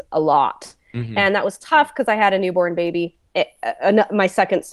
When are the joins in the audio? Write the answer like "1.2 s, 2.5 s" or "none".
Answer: 3.2 s